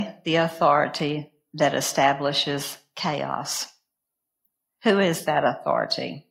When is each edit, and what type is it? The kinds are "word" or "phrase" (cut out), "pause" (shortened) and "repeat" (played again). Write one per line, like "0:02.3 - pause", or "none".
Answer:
none

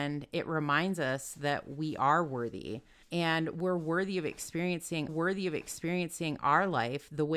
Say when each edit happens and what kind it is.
0:03.0 - pause
0:05.1 - repeat

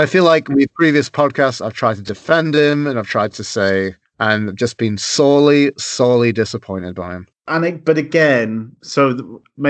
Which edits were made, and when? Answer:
0:08.8 - pause

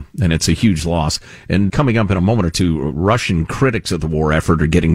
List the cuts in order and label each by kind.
0:01.7 - word

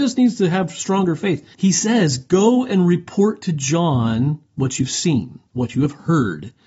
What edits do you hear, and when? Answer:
0:01.5 - pause
0:05.5 - pause

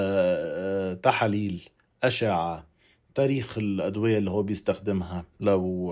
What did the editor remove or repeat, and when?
none

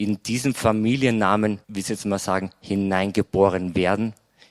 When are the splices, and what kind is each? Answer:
0:01.6 - pause

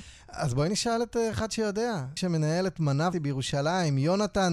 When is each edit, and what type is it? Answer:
0:02.2 - phrase
0:03.1 - word

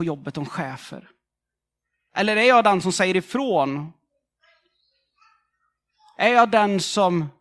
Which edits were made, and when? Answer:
none

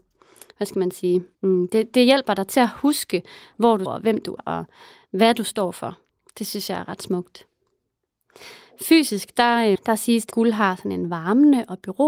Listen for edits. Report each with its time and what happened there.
0:01.3 - pause
0:03.9 - word
0:04.4 - word
0:06.1 - pause
0:09.7 - word
0:10.3 - word

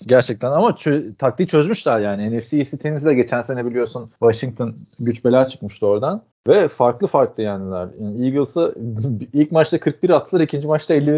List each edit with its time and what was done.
0:04.2 - pause
0:06.3 - pause

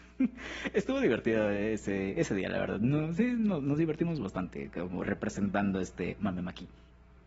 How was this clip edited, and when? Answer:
none

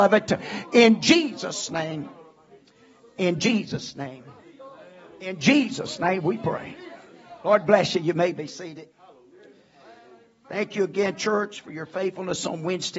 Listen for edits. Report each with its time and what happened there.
none

